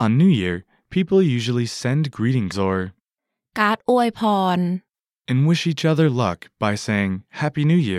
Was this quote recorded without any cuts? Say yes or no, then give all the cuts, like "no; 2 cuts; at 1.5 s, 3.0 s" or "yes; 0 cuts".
no; 1 cut; at 2.5 s